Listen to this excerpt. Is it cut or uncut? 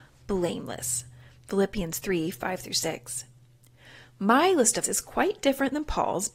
cut